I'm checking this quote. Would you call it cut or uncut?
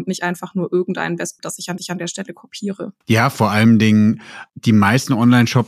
cut